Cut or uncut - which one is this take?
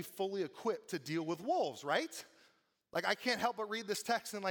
uncut